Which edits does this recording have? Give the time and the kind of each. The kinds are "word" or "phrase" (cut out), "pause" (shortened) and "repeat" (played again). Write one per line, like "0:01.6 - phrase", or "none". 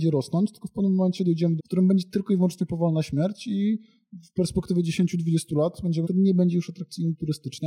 0:01.6 - phrase
0:06.0 - word